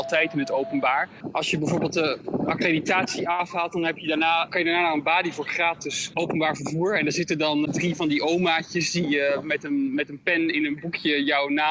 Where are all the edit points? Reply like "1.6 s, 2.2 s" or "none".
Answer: 7.6 s